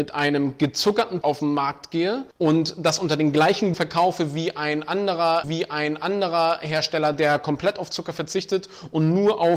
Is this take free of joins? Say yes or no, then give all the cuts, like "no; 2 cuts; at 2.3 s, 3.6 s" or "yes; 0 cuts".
no; 4 cuts; at 1.2 s, 2.3 s, 3.7 s, 5.4 s